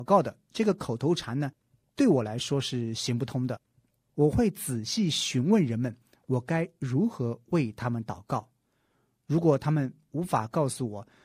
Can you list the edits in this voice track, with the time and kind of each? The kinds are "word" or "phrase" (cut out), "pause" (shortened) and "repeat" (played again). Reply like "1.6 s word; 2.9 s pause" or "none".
none